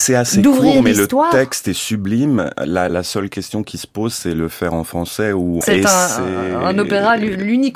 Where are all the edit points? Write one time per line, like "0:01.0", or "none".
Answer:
0:02.9
0:05.6